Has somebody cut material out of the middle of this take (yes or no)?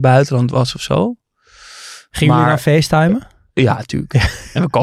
no